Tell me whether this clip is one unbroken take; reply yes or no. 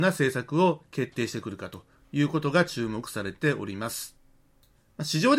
yes